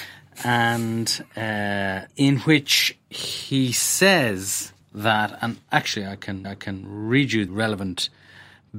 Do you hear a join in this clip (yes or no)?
yes